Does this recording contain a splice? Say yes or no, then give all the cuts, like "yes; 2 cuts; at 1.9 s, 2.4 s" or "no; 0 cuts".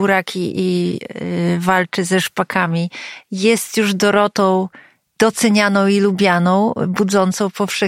no; 0 cuts